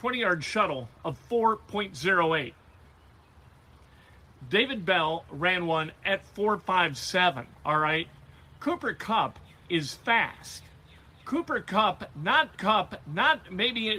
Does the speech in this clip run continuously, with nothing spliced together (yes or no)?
no